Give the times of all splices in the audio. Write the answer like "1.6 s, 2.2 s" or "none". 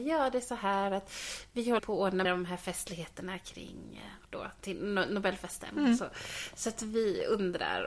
1.8 s, 2.2 s, 4.2 s